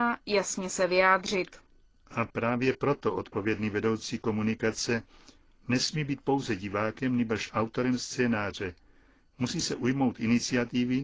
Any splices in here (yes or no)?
no